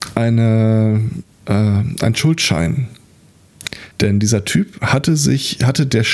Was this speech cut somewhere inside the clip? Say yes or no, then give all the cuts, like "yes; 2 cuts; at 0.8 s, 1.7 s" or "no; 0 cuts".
yes; 1 cut; at 3.9 s